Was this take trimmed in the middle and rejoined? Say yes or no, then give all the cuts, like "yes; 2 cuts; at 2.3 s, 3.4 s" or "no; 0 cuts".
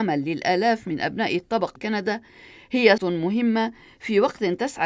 yes; 2 cuts; at 1.8 s, 3.0 s